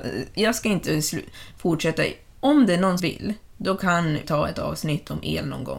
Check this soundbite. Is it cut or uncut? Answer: cut